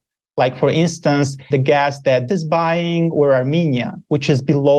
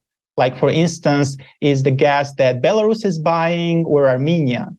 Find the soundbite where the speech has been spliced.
first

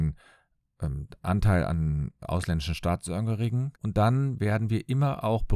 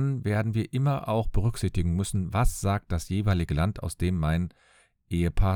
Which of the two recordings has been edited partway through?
first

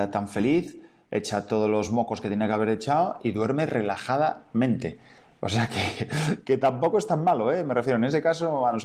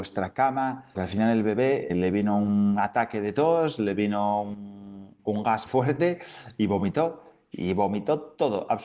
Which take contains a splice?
second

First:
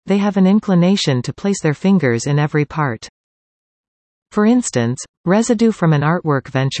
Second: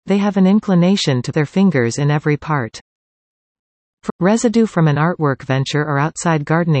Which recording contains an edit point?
second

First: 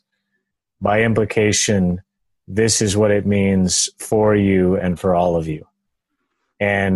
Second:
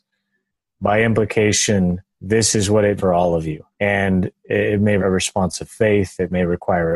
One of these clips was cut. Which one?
second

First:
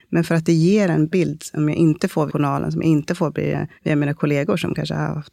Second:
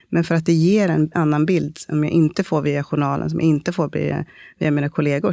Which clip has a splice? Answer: first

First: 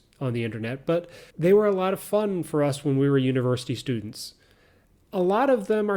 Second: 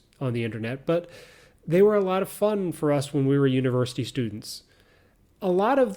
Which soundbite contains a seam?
first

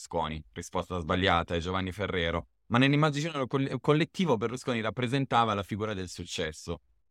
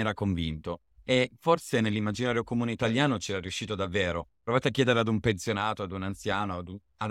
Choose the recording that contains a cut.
second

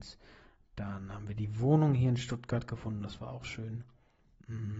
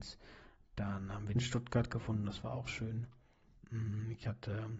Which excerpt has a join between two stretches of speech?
second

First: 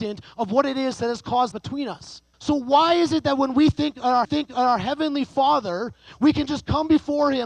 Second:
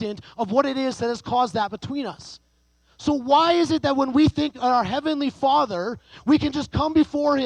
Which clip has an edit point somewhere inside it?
first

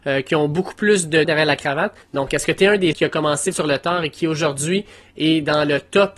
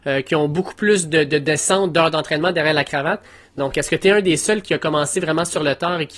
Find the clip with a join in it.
first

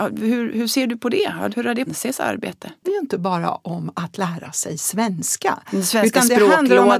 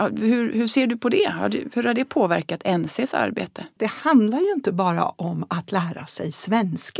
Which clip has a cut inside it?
first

